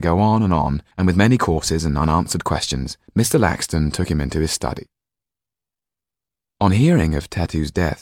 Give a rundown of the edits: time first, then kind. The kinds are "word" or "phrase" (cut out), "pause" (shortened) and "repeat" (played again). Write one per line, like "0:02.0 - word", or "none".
0:00.9 - pause
0:03.1 - pause